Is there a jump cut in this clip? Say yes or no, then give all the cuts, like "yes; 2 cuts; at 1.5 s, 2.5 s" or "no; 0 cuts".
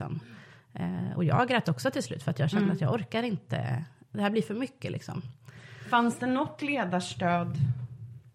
no; 0 cuts